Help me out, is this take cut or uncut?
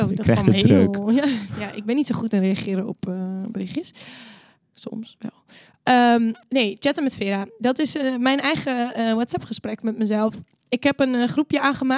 uncut